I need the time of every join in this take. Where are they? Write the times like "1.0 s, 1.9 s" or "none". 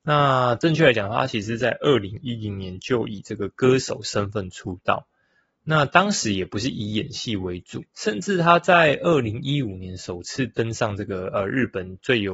7.9 s